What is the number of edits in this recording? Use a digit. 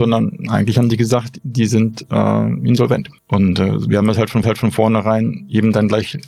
2